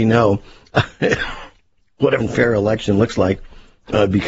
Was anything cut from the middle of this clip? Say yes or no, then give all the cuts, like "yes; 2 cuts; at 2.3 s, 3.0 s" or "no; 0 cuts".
yes; 1 cut; at 2.2 s